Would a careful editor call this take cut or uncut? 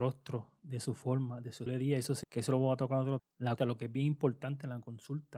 cut